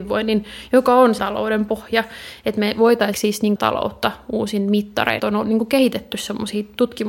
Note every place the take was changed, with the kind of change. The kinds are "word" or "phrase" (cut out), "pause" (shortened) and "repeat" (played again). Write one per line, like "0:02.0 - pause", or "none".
0:01.2 - word
0:03.1 - word
0:03.6 - word
0:05.2 - word